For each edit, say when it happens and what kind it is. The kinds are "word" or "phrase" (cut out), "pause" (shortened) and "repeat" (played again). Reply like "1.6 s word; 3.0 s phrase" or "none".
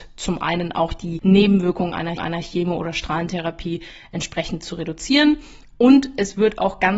2.2 s repeat